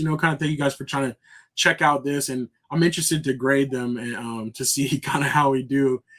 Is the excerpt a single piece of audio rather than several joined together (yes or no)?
yes